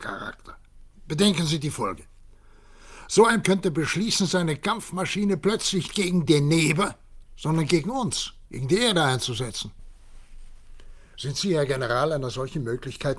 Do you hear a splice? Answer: yes; 5 cuts; at 3.4 s, 5.9 s, 6.3 s, 7.3 s, 8.5 s

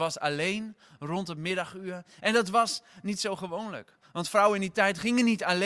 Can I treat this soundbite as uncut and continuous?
yes; 0 cuts

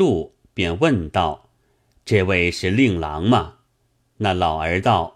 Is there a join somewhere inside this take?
yes; 2 cuts; at 1.6 s, 3.6 s

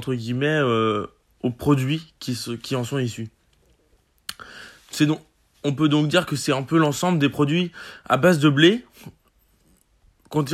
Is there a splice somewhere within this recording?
no; 0 cuts

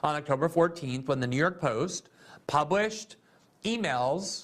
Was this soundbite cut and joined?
no; 0 cuts

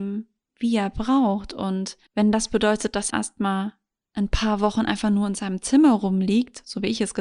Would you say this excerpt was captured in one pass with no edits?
no; 2 cuts; at 2.1 s, 3.1 s

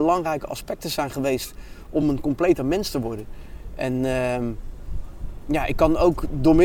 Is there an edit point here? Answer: no; 0 cuts

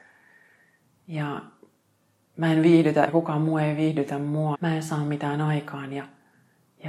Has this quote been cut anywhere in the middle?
yes; 2 cuts; at 3.1 s, 4.5 s

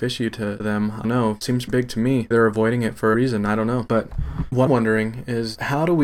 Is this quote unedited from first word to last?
no; 4 cuts; at 1.0 s, 1.7 s, 2.3 s, 4.7 s

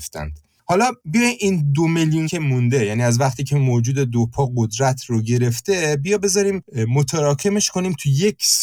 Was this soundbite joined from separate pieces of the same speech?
yes; 1 cut; at 2.3 s

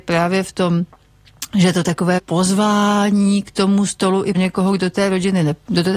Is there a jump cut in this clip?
yes; 2 cuts; at 2.2 s, 4.3 s

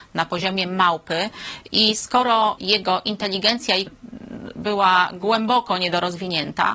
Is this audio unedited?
no; 2 cuts; at 2.6 s, 3.9 s

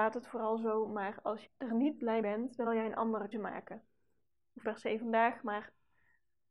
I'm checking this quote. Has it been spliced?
yes; 5 cuts; at 1.5 s, 2.2 s, 2.7 s, 3.3 s, 4.6 s

